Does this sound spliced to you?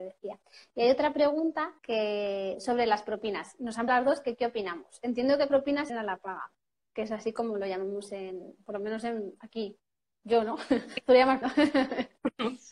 yes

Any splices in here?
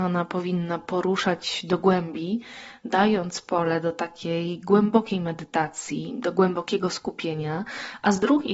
no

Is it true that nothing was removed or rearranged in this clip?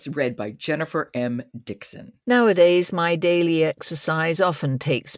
no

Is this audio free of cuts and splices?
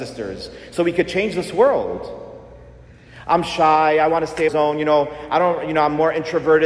no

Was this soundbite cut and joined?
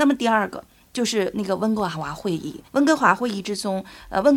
yes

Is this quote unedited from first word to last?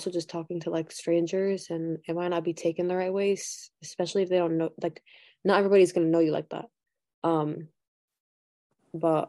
yes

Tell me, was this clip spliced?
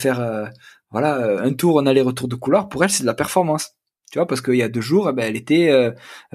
no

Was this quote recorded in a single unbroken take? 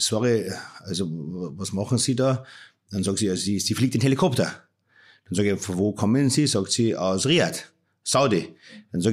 yes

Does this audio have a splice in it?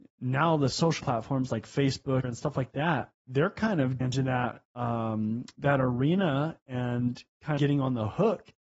yes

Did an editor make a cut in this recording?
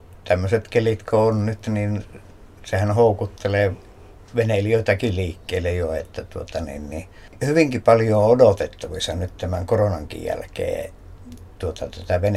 no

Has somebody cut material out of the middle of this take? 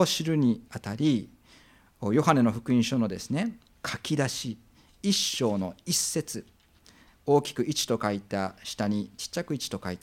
no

